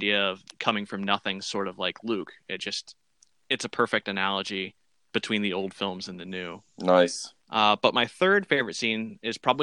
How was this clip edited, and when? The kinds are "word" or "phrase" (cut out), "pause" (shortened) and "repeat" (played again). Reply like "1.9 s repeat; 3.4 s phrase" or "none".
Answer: 7.4 s pause